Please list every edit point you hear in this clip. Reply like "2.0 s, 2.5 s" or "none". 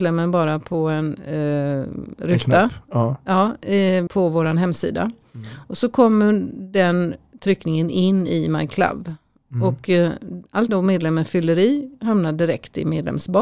4.1 s, 10.7 s

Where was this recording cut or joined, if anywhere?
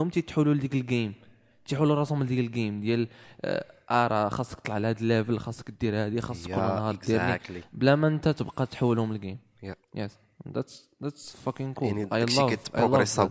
none

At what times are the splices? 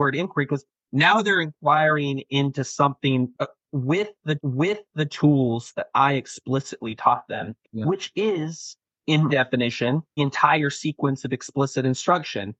3.3 s, 4.4 s, 9.3 s, 10.2 s

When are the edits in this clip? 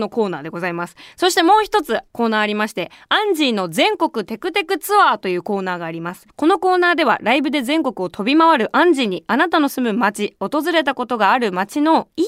2.1 s, 6.3 s

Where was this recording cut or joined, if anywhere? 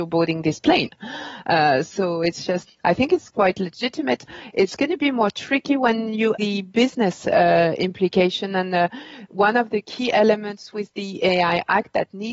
2.7 s, 6.4 s

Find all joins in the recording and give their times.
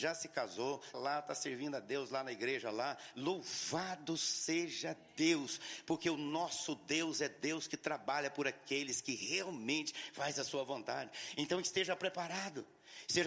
0.9 s

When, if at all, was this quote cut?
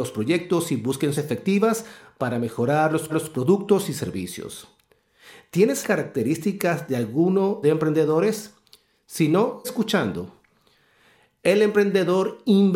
1.1 s, 3.1 s, 5.8 s, 7.6 s, 9.6 s

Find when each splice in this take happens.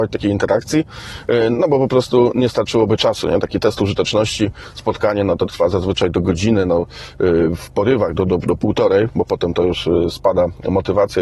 none

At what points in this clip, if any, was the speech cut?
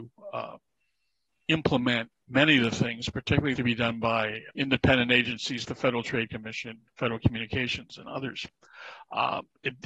3.6 s, 4.5 s, 5.6 s, 6.9 s

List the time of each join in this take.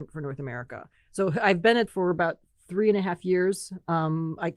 1.9 s

